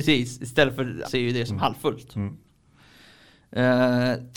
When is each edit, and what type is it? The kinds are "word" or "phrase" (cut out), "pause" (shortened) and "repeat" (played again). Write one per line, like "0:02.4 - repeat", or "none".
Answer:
0:01.0 - word